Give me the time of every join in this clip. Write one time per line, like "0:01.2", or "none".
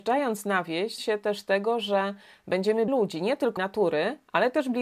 0:01.0
0:02.9
0:03.6